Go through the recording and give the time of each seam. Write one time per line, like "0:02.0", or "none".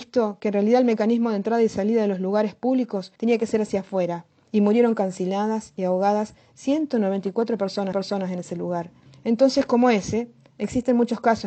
0:03.2
0:07.9
0:09.1